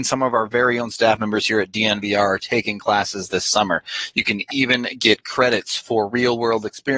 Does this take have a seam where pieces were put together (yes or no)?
no